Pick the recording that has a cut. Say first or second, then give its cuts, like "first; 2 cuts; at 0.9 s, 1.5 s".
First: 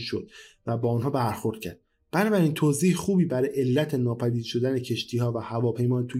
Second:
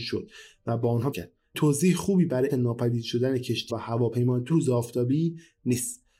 second; 5 cuts; at 1.1 s, 1.5 s, 2.5 s, 3.7 s, 4.5 s